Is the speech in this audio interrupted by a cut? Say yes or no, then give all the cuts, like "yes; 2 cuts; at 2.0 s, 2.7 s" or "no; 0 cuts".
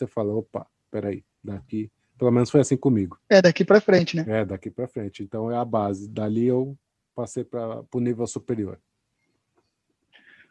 yes; 3 cuts; at 1.3 s, 3.2 s, 7.0 s